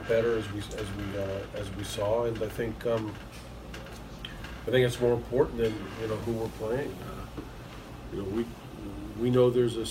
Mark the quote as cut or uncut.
uncut